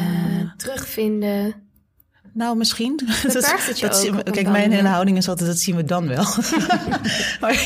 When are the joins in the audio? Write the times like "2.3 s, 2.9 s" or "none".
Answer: none